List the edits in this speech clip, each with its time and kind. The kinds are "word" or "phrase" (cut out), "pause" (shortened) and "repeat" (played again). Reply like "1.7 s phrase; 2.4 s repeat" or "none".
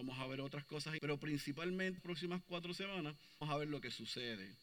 1.0 s word; 2.0 s word; 3.4 s word

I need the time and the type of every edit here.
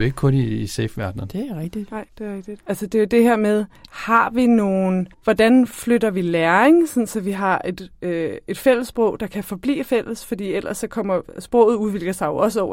2.1 s pause; 3.8 s pause; 5.1 s pause

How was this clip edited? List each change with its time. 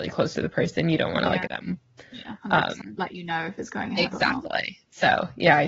1.5 s word; 3.0 s word

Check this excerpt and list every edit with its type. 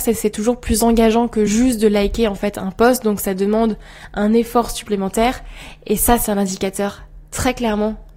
none

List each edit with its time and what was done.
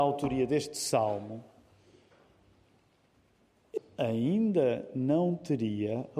3.8 s word

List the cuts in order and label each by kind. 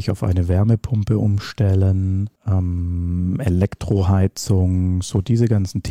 2.4 s pause

